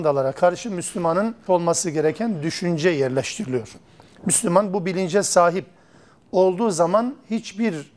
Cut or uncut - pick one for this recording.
cut